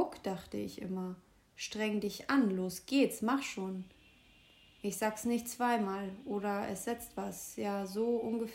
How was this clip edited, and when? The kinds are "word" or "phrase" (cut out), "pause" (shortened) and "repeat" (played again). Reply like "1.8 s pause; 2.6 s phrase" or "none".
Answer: none